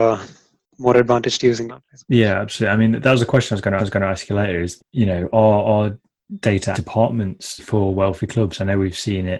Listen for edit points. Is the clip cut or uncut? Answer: cut